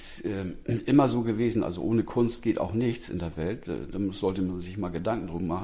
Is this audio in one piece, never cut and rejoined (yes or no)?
yes